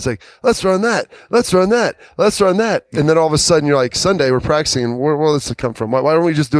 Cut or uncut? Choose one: uncut